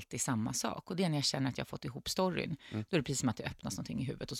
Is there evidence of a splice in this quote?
no; 0 cuts

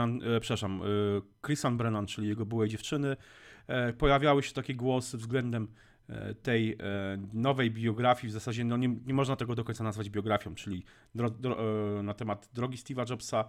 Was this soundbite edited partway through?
no; 0 cuts

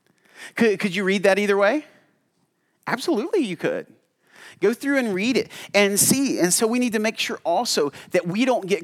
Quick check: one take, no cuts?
yes; 0 cuts

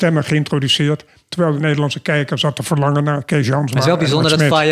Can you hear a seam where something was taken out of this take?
no; 0 cuts

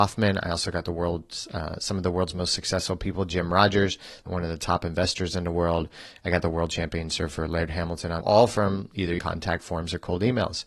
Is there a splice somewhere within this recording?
yes; 2 cuts; at 8.2 s, 9.2 s

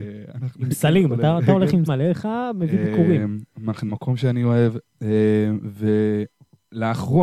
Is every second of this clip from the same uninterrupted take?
no; 2 cuts; at 1.9 s, 3.9 s

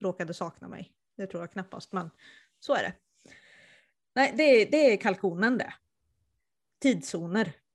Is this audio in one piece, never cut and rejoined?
yes; 0 cuts

